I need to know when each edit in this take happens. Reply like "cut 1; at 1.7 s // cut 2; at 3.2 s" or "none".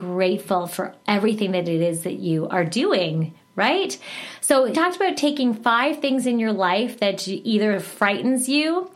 cut 1; at 4.7 s